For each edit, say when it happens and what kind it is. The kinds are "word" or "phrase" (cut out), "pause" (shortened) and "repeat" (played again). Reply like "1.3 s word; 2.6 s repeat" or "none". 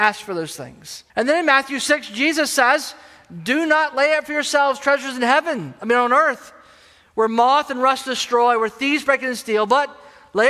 1.1 s pause